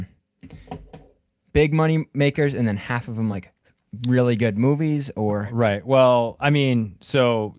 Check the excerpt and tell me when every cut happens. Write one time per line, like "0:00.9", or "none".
none

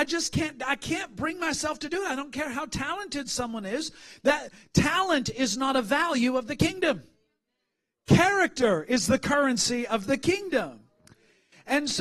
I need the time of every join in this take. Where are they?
none

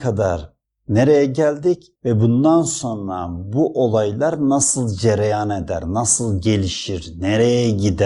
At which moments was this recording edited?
0:02.0

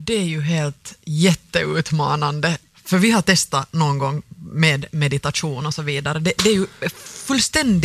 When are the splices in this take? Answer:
none

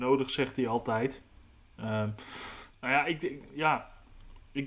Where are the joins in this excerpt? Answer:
none

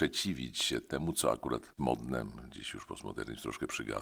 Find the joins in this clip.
0:01.8

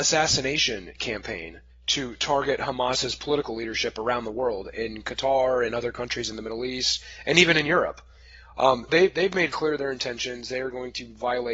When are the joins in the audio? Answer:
0:01.7
0:08.9
0:09.5

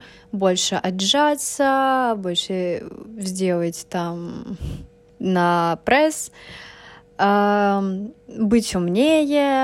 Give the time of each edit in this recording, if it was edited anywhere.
0:05.1

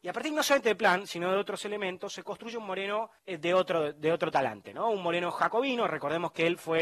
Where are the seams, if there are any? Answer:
0:03.2

